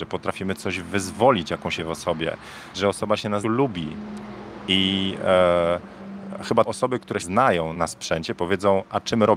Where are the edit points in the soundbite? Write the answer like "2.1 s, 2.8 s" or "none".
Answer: 1.8 s, 2.7 s, 3.4 s, 6.7 s, 7.2 s, 7.7 s